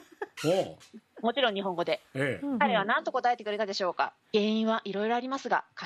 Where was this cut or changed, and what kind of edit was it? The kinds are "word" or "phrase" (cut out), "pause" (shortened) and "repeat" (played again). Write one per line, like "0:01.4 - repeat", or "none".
0:04.2 - pause